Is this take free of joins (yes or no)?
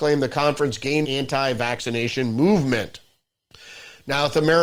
no